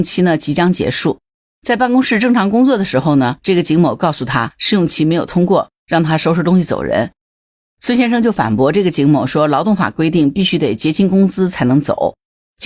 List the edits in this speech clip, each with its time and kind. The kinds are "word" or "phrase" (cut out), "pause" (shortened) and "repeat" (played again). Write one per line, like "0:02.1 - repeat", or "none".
none